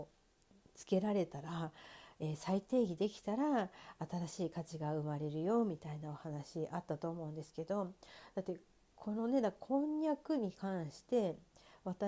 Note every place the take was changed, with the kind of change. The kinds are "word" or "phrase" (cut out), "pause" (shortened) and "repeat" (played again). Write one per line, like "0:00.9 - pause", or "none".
none